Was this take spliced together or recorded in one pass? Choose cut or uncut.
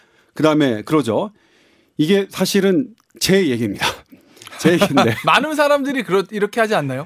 uncut